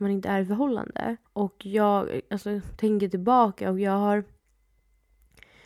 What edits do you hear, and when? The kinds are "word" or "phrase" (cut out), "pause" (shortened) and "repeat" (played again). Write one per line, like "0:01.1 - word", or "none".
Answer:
0:01.3 - pause